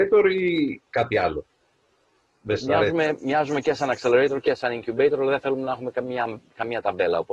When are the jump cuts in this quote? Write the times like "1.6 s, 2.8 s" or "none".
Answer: none